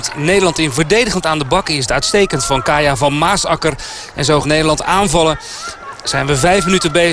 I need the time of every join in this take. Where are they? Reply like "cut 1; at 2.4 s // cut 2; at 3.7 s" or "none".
cut 1; at 1.2 s // cut 2; at 1.9 s // cut 3; at 4.4 s